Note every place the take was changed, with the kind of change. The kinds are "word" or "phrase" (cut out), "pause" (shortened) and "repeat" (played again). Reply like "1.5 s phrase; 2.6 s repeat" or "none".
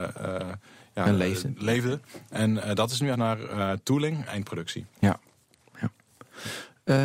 3.1 s phrase; 4.3 s word